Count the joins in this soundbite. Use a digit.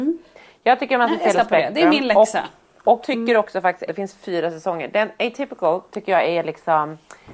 3